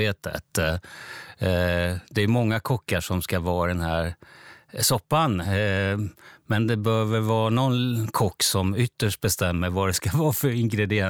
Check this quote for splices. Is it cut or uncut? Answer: uncut